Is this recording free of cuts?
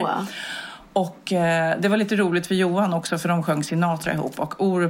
yes; 0 cuts

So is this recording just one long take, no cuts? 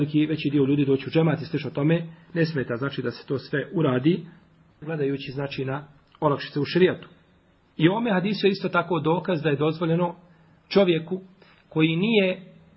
yes; 0 cuts

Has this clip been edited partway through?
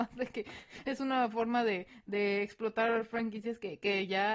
no; 0 cuts

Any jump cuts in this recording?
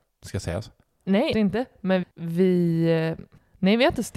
yes; 2 cuts; at 1.3 s, 2.0 s

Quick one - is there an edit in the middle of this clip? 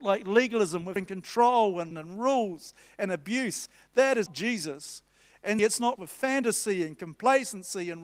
yes; 5 cuts; at 1.0 s, 1.9 s, 4.3 s, 5.6 s, 6.0 s

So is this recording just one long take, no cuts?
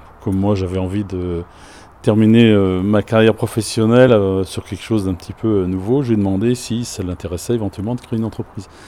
yes; 0 cuts

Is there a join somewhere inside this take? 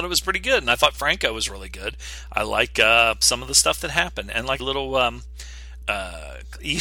yes; 2 cuts; at 4.6 s, 5.8 s

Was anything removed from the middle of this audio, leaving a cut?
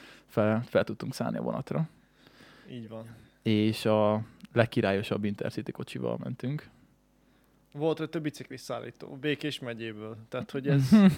no; 0 cuts

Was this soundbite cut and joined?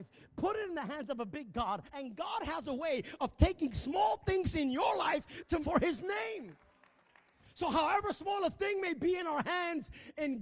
yes; 2 cuts; at 1.9 s, 5.6 s

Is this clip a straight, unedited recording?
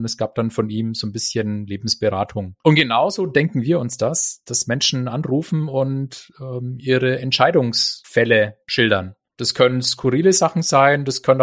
no; 1 cut; at 2.6 s

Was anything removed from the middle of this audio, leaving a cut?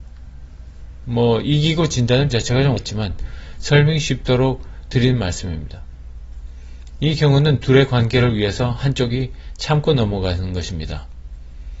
yes; 2 cuts; at 2.3 s, 2.8 s

